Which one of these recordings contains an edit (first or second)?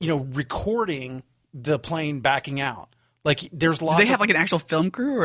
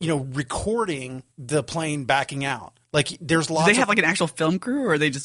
second